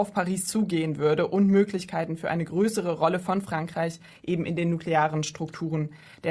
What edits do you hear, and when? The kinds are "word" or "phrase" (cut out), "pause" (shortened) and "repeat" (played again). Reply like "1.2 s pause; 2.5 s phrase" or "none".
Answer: none